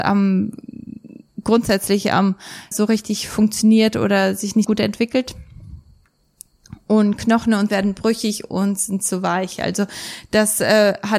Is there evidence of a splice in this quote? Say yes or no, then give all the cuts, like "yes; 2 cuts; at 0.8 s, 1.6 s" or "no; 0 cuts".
yes; 3 cuts; at 2.7 s, 4.6 s, 7.7 s